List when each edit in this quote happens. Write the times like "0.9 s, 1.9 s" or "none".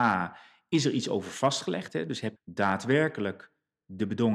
2.4 s